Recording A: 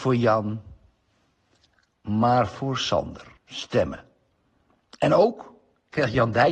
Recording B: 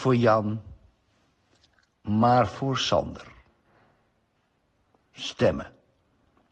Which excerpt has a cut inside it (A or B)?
A